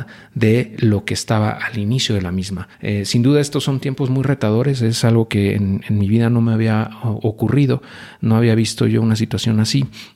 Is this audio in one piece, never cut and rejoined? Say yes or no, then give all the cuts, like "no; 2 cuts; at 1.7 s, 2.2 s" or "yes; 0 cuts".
no; 1 cut; at 2.7 s